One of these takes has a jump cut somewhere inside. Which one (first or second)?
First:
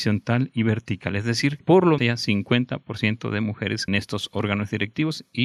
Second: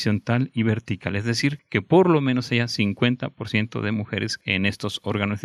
first